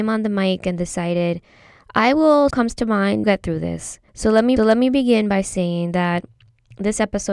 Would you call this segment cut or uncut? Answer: cut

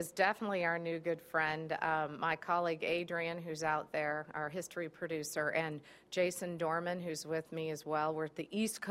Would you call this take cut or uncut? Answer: uncut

